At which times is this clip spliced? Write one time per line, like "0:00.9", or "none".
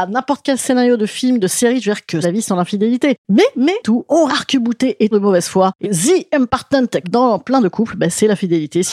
0:02.2
0:03.8
0:04.3
0:05.1
0:05.8
0:07.0